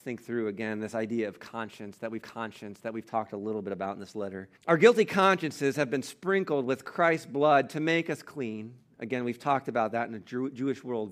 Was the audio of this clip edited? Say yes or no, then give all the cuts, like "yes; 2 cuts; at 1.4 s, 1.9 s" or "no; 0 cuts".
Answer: yes; 2 cuts; at 2.2 s, 4.6 s